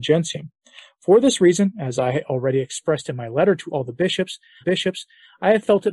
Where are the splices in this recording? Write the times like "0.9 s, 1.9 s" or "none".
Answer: 4.6 s